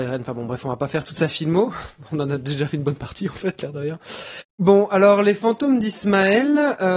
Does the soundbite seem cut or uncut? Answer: uncut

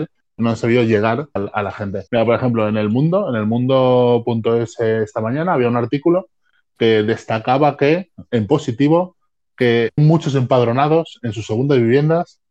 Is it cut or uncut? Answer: cut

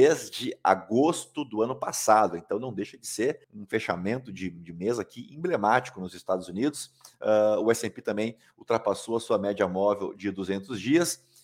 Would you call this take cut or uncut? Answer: cut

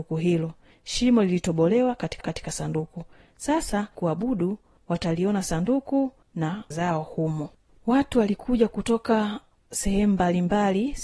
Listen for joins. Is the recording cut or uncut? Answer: cut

